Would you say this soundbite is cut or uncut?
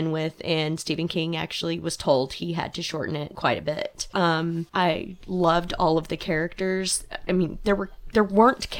uncut